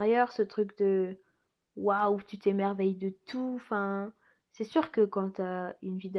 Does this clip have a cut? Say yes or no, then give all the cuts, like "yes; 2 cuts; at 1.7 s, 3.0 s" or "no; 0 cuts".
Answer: no; 0 cuts